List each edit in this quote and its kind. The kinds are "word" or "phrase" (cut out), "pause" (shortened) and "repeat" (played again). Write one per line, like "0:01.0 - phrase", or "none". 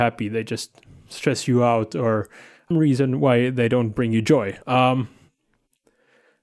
0:02.7 - phrase
0:04.6 - pause